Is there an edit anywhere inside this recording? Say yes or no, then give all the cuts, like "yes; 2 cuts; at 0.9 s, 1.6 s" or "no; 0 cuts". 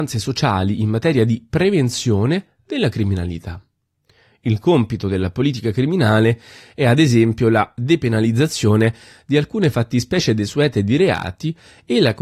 no; 0 cuts